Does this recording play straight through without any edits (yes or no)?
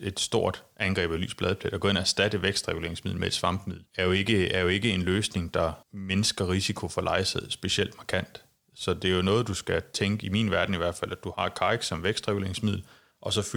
no